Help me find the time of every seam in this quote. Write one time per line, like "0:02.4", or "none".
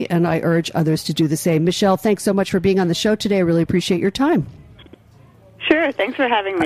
none